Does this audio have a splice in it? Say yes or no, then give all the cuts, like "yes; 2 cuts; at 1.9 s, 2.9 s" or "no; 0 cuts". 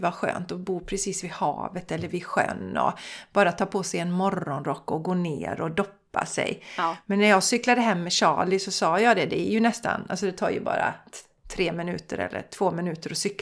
no; 0 cuts